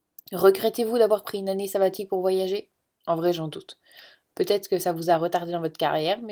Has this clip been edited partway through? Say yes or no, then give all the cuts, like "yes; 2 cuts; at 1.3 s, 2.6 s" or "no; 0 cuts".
no; 0 cuts